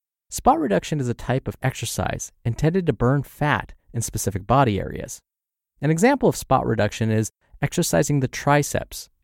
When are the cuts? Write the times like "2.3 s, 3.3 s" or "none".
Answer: 1.6 s